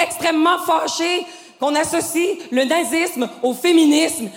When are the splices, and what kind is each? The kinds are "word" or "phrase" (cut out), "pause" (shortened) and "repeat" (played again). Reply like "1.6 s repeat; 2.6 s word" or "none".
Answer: none